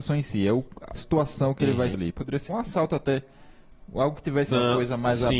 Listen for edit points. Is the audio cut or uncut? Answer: cut